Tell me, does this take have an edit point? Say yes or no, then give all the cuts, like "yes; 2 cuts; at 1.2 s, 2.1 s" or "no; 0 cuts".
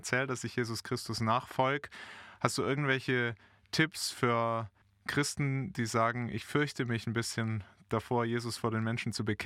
no; 0 cuts